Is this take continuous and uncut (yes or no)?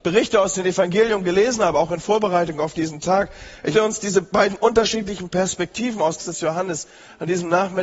no